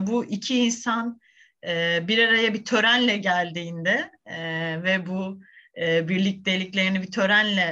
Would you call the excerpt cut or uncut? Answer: uncut